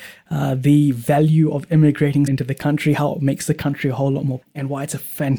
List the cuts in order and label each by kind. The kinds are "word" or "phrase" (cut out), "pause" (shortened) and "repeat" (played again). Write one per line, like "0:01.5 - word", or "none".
0:02.3 - word
0:04.4 - word